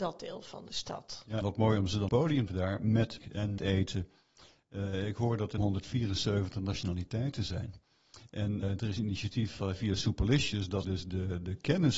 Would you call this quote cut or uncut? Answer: cut